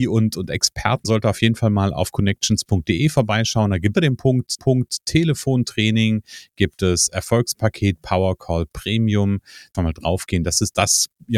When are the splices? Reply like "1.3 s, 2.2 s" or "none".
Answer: 1.0 s, 3.9 s, 4.6 s, 9.7 s